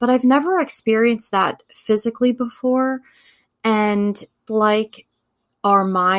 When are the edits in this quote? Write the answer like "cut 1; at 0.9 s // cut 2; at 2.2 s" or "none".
cut 1; at 4.5 s